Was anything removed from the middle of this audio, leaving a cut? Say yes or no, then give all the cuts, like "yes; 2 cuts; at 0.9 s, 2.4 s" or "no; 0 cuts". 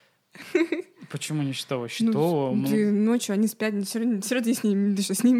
no; 0 cuts